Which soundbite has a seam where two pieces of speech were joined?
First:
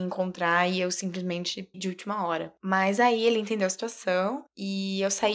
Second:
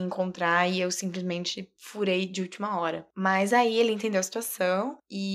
first; 1 cut; at 1.7 s

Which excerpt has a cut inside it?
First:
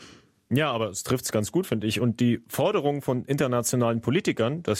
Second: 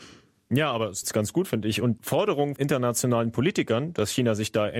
second; 3 cuts; at 1.0 s, 2.0 s, 2.6 s

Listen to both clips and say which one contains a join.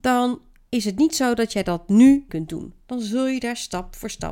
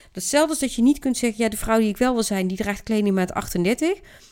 first; 1 cut; at 2.3 s

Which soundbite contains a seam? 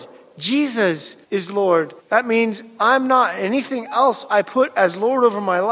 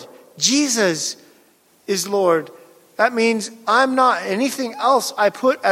first; 2 cuts; at 1.2 s, 2.0 s

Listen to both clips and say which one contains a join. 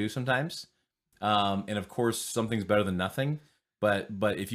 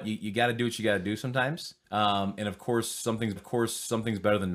second; 2 cuts; at 1.8 s, 3.4 s

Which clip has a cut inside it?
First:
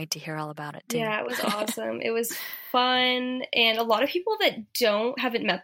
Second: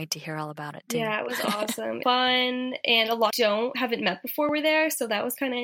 second; 2 cuts; at 2.0 s, 3.3 s

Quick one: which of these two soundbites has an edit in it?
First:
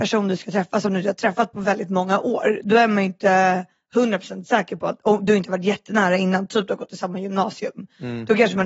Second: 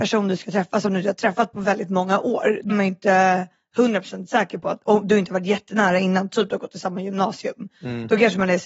second; 1 cut; at 2.7 s

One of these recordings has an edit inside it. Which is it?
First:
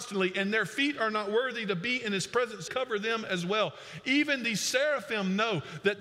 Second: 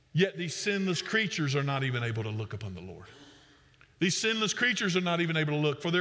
first; 1 cut; at 2.7 s

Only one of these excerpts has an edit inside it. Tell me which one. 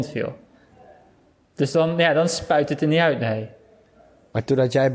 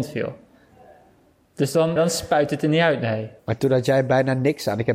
second; 2 cuts; at 2.0 s, 3.4 s

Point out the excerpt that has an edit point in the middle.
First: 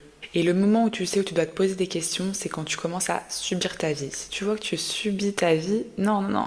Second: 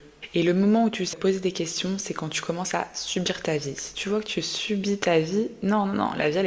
second; 1 cut; at 1.1 s

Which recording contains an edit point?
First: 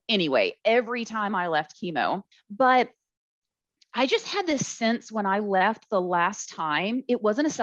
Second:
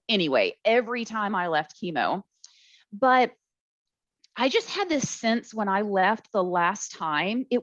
first; 1 cut; at 2.3 s

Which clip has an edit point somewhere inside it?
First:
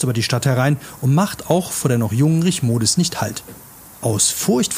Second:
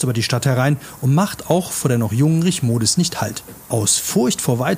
second; 1 cut; at 3.6 s

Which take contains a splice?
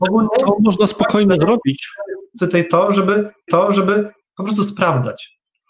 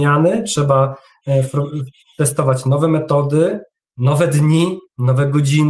first; 1 cut; at 3.5 s

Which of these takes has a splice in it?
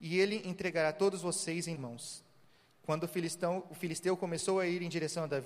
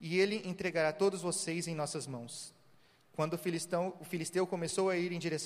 first; 1 cut; at 1.8 s

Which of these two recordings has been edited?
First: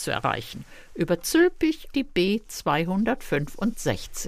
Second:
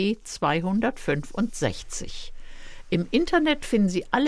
first; 1 cut; at 1.9 s

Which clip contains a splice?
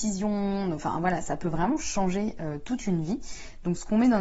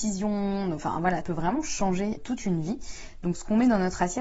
second; 2 cuts; at 1.2 s, 2.2 s

